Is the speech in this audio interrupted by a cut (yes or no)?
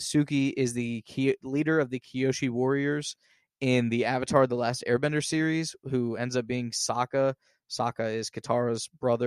no